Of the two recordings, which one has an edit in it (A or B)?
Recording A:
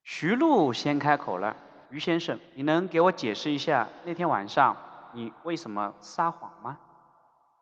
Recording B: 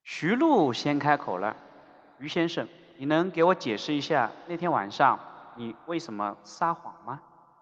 A